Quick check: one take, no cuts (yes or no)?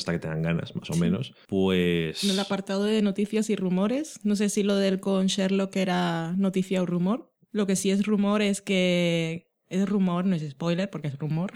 no